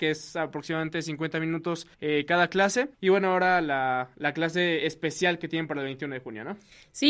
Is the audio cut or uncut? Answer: cut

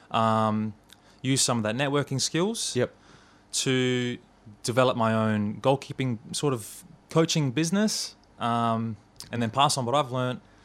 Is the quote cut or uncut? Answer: uncut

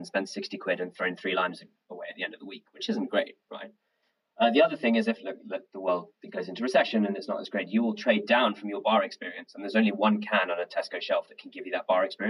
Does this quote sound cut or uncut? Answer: uncut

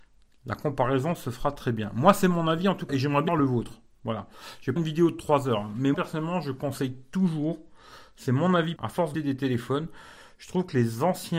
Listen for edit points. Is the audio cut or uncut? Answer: cut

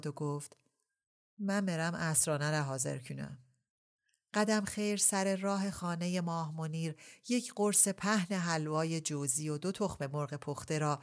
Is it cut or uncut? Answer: uncut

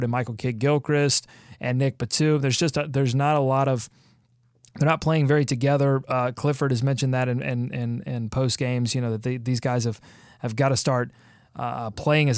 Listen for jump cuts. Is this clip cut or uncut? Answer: uncut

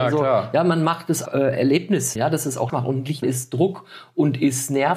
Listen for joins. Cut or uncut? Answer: cut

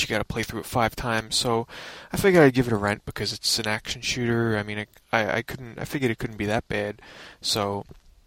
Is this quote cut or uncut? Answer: uncut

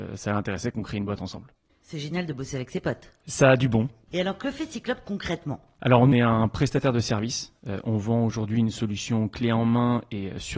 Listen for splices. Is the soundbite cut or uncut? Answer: cut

